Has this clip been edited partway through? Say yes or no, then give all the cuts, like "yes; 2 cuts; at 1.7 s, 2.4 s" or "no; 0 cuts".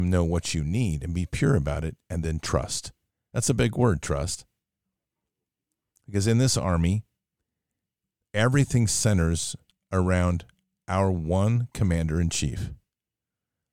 no; 0 cuts